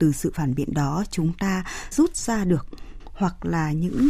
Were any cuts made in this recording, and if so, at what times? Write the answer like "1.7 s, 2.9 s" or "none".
1.9 s, 3.0 s